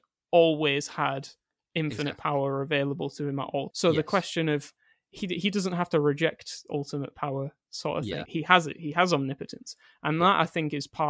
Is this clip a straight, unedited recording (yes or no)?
no